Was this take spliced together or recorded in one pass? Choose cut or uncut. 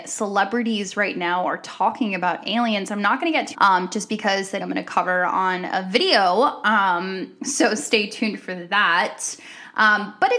cut